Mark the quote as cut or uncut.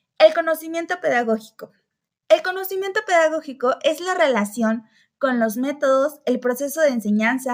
uncut